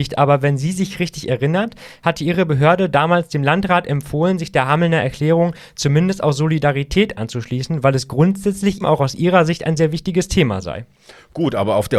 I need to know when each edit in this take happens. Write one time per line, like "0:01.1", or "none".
0:08.8